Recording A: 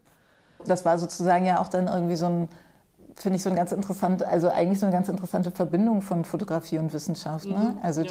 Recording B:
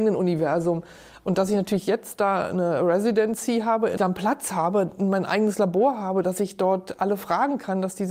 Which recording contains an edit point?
B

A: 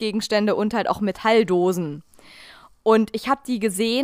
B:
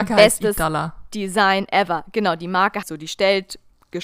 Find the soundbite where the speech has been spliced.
B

